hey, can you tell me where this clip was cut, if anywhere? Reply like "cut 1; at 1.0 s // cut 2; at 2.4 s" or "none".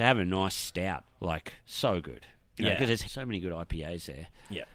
cut 1; at 1.1 s // cut 2; at 1.6 s // cut 3; at 3.0 s